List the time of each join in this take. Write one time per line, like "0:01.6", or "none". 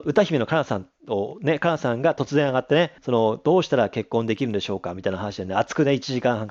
0:03.0